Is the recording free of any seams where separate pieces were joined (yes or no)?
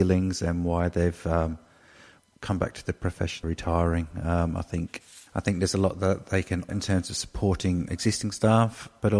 no